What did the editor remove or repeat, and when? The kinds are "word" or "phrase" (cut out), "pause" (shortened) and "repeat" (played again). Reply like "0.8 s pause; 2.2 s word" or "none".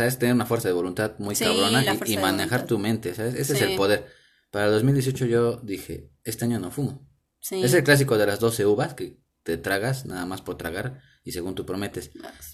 none

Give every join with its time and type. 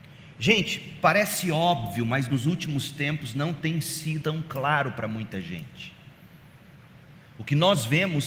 4.2 s word

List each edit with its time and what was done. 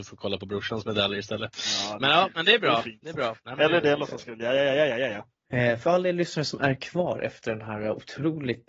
3.4 s pause

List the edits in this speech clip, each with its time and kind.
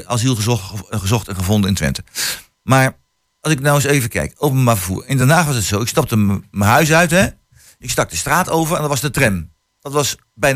none

